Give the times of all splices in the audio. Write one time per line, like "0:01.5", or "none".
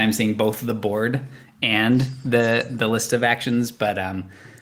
none